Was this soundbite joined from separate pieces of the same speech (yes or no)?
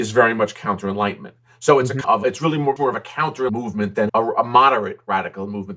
yes